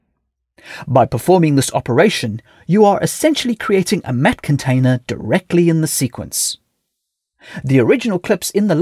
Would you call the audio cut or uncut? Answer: uncut